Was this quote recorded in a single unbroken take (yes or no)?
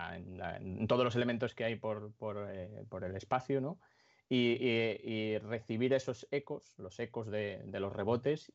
yes